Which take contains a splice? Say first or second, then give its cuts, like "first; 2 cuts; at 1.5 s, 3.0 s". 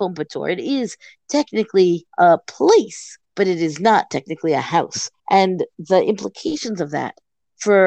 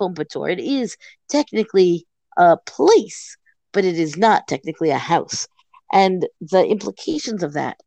first; 3 cuts; at 2.1 s, 3.2 s, 5.2 s